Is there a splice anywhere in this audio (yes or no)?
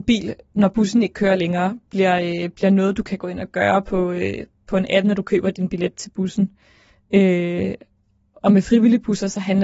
no